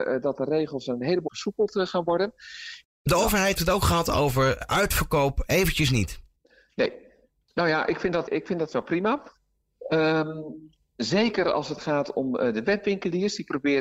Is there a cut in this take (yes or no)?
yes